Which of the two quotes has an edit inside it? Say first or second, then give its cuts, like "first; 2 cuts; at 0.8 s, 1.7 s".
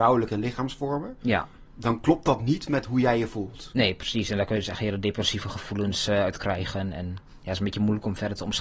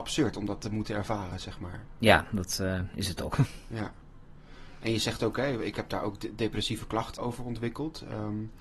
second; 1 cut; at 7.2 s